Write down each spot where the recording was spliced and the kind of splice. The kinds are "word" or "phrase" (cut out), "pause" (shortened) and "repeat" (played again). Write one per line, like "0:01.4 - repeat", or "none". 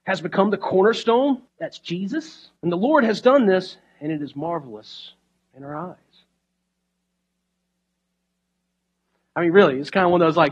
0:01.5 - pause
0:02.6 - pause